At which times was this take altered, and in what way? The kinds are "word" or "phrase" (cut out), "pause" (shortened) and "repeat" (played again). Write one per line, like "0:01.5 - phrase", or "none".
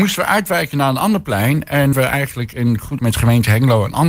0:01.9 - word
0:03.0 - word